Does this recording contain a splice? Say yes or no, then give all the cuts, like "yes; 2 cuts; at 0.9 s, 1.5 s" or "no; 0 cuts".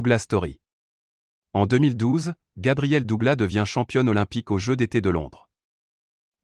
no; 0 cuts